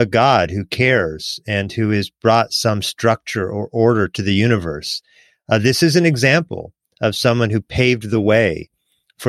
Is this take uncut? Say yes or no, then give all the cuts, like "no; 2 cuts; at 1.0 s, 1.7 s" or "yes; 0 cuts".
yes; 0 cuts